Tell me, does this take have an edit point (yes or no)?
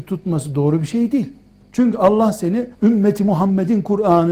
yes